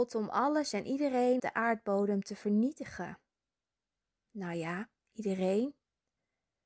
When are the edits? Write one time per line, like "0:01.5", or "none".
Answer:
0:01.4